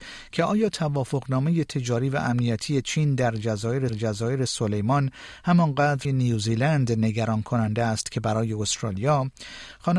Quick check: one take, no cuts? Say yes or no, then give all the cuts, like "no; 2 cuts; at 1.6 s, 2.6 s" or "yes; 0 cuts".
no; 2 cuts; at 3.9 s, 6.0 s